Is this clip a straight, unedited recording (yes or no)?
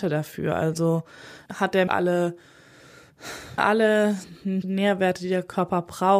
no